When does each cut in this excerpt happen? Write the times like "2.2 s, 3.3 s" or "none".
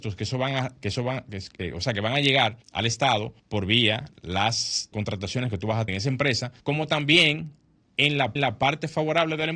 2.6 s, 3.4 s, 4.9 s, 5.9 s, 6.6 s, 8.4 s